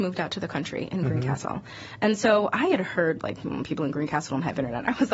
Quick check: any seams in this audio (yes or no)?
no